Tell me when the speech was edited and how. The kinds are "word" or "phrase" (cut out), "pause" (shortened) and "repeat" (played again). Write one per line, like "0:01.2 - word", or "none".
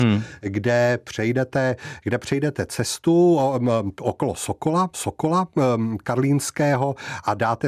0:04.9 - repeat

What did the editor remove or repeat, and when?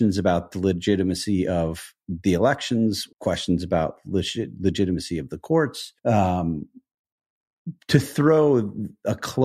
0:03.1 - pause
0:06.0 - pause

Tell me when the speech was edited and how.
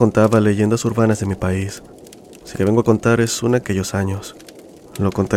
0:02.5 - phrase
0:03.6 - phrase

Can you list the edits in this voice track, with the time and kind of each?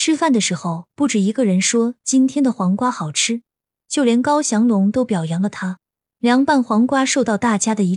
none

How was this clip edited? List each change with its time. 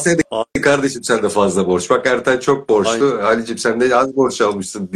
none

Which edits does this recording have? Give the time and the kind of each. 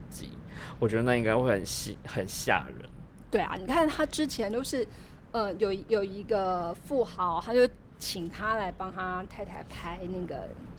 none

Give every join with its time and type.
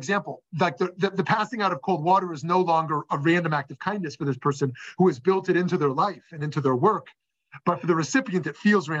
none

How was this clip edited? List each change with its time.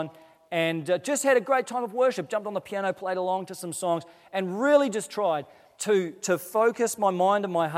none

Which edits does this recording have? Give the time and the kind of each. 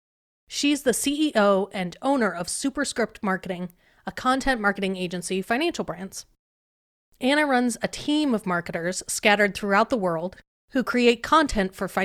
0:05.4 - word

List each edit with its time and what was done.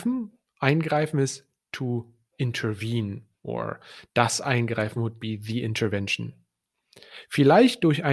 none

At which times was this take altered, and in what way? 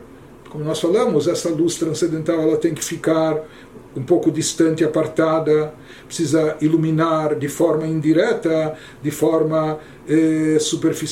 none

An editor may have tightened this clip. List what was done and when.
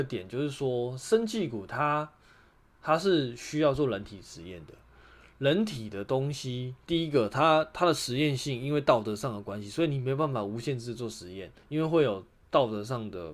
0:06.8 - pause
0:11.6 - pause

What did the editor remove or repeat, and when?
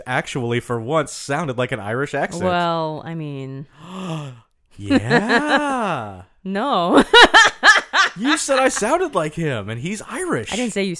none

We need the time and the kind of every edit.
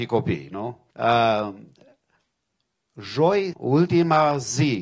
0:00.9 - pause
0:03.5 - word

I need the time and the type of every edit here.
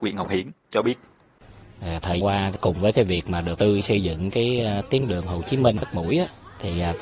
0:02.2 - word
0:03.6 - word

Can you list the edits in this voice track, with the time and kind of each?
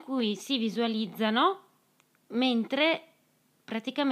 none

